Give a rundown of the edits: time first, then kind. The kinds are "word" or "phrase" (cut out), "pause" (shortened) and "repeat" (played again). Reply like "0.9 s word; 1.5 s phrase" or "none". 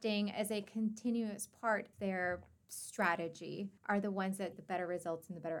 1.9 s word; 3.8 s pause; 4.5 s word